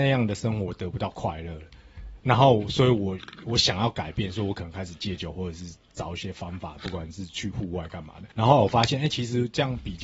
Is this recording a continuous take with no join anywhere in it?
no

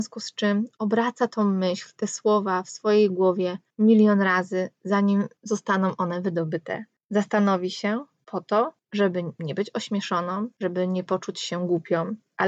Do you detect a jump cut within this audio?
no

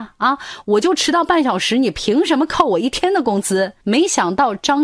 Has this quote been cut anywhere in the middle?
yes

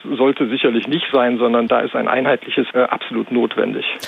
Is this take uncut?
no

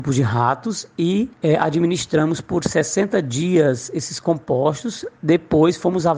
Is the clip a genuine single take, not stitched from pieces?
yes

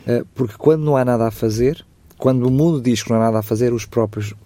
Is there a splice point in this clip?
no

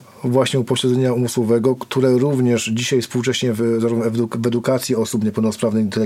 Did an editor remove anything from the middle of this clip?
no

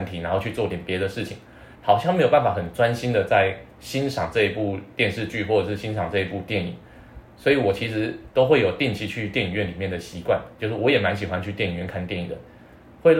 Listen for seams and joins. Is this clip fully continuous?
no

